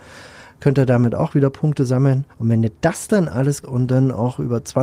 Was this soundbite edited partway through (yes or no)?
yes